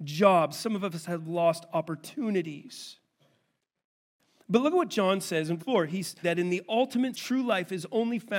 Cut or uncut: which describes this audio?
cut